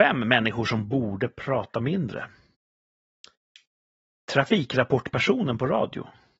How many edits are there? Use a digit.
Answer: 0